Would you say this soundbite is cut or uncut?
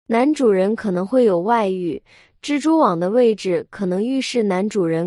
uncut